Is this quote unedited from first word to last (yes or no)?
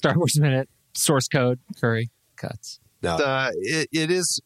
no